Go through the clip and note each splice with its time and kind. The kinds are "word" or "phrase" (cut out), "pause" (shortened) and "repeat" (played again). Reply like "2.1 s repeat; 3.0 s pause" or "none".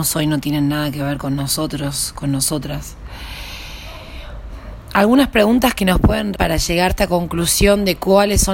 6.3 s word; 6.9 s word